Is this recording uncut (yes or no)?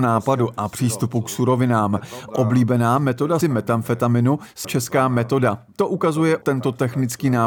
no